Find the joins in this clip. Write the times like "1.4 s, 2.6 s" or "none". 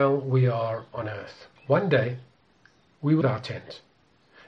1.6 s, 3.2 s